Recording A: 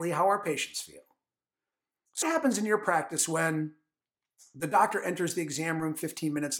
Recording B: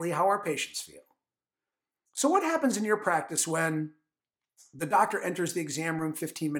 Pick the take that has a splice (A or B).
A